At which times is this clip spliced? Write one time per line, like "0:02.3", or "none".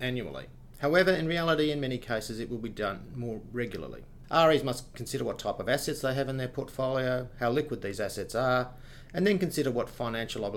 none